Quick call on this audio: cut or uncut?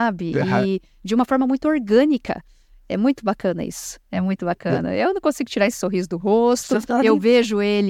uncut